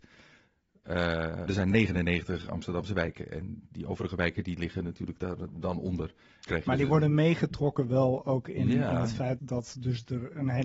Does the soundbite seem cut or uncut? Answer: cut